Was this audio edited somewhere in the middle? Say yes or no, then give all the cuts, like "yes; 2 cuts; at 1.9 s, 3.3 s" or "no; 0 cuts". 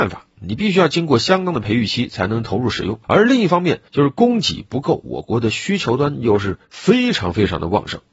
yes; 3 cuts; at 3.0 s, 3.9 s, 6.6 s